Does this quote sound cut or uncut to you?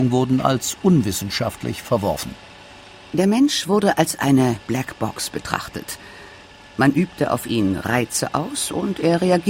uncut